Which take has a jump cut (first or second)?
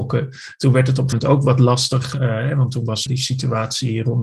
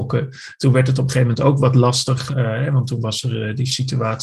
first